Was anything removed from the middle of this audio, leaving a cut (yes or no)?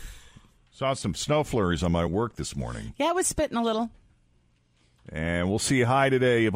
yes